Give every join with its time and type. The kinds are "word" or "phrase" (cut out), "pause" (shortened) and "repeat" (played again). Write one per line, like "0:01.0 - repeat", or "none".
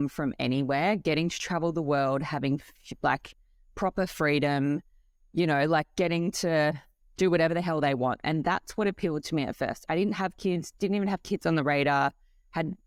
none